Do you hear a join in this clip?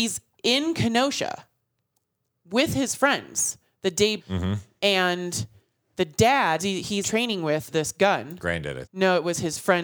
yes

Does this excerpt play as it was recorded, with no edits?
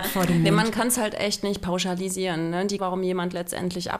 no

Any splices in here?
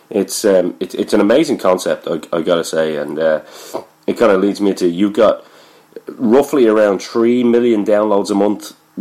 no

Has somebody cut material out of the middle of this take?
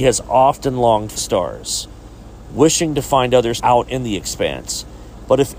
yes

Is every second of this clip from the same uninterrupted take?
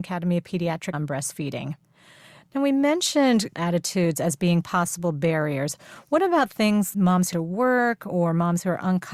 no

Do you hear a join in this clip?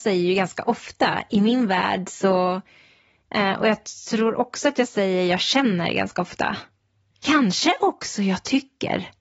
no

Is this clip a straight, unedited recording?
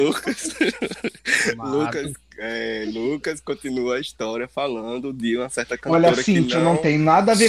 yes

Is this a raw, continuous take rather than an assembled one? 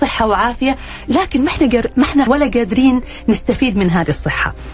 no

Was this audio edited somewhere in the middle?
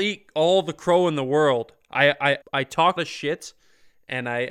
yes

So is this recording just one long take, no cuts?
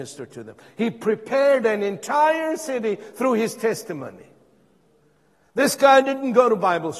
yes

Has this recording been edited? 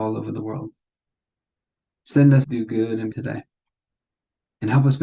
yes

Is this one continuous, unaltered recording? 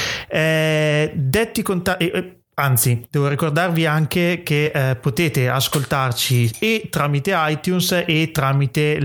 yes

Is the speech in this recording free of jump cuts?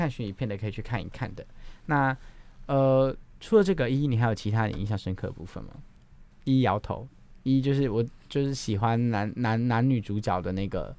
no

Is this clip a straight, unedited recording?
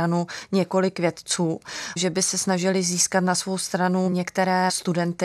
yes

